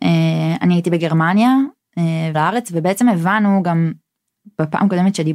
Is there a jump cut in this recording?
yes; 1 cut; at 2.3 s

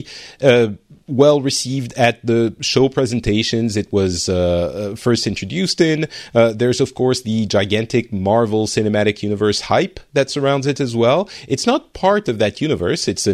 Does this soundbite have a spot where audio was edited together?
no; 0 cuts

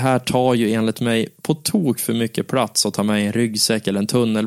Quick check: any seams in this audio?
no; 0 cuts

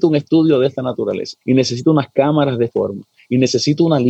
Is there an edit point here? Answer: yes; 2 cuts; at 1.4 s, 2.7 s

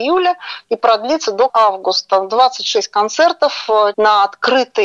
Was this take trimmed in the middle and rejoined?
yes; 2 cuts; at 1.5 s, 3.9 s

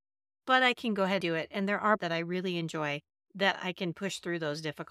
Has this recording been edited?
yes; 3 cuts; at 1.2 s, 2.0 s, 3.1 s

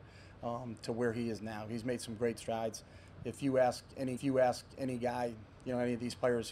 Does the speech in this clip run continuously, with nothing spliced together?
no; 1 cut; at 4.2 s

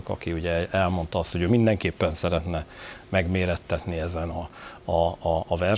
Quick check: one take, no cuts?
yes; 0 cuts

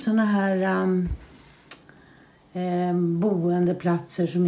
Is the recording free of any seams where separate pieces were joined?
yes; 0 cuts

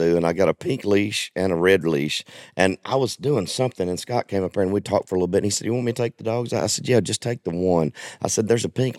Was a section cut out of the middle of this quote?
no; 0 cuts

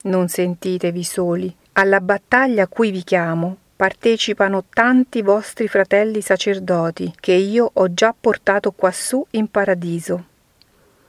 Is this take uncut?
no; 2 cuts; at 1.7 s, 7.2 s

